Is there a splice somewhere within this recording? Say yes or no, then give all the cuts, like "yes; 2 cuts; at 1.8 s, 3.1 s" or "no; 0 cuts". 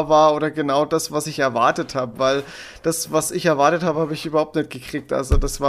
no; 0 cuts